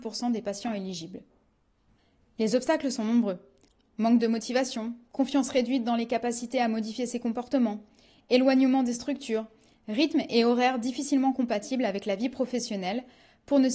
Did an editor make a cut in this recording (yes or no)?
no